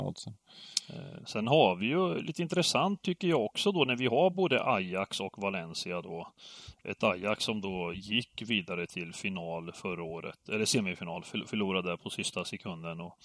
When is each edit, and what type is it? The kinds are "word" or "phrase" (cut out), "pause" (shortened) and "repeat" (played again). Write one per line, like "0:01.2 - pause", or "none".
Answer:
none